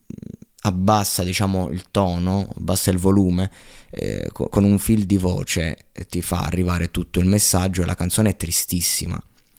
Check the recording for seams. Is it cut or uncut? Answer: uncut